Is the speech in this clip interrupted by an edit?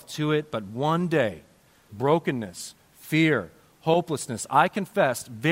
yes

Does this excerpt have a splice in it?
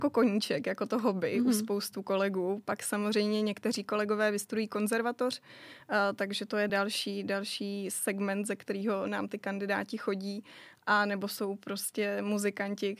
no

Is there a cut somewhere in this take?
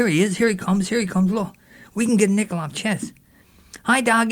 no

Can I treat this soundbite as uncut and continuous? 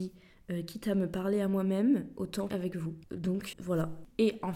no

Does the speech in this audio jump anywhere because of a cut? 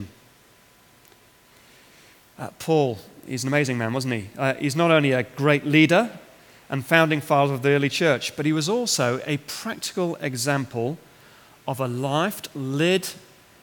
no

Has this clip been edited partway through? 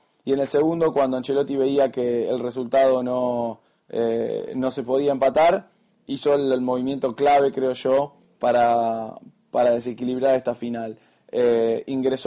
no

